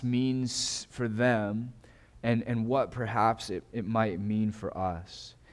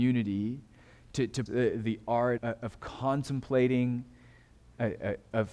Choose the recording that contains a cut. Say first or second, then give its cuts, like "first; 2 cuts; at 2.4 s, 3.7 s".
second; 2 cuts; at 1.5 s, 2.4 s